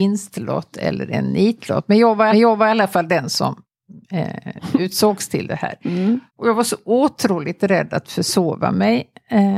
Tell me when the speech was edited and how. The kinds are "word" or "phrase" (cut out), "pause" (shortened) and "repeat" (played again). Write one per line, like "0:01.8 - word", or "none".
0:02.3 - repeat
0:04.0 - pause
0:06.3 - pause